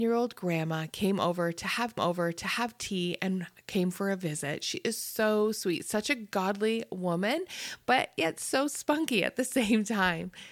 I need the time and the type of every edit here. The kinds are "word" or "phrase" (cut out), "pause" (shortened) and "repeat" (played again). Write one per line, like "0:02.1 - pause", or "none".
0:02.0 - repeat